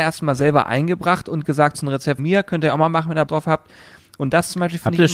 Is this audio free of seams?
no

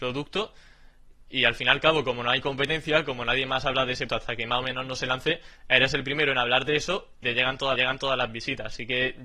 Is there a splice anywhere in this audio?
yes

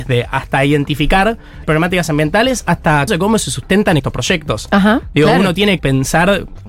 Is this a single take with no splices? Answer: no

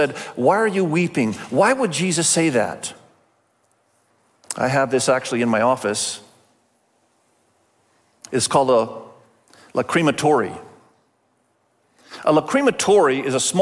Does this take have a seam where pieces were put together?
no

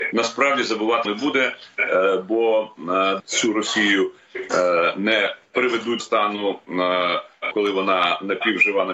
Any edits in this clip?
yes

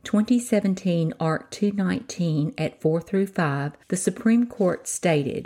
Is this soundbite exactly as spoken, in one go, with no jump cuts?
no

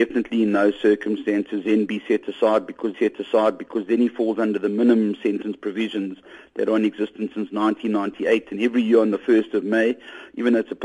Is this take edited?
yes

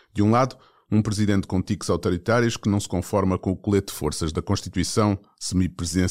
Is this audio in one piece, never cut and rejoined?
yes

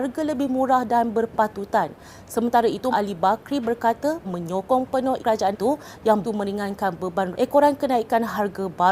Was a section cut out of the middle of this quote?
yes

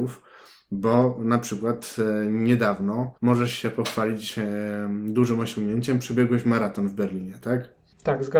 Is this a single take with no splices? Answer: no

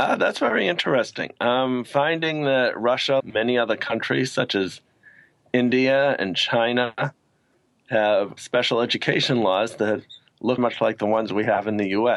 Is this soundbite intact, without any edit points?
no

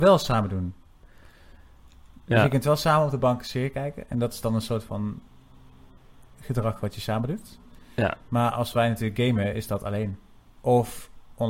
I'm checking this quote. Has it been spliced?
no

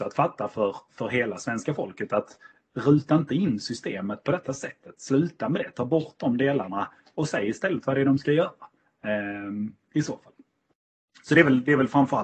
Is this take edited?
no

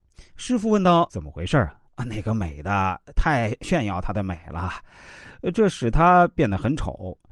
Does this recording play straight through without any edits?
no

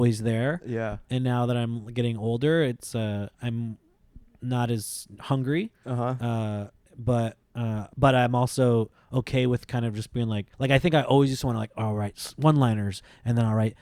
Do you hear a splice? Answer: yes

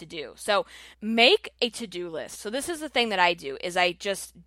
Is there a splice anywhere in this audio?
yes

